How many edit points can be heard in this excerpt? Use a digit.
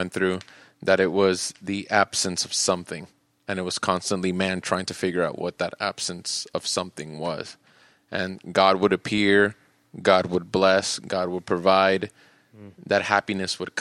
0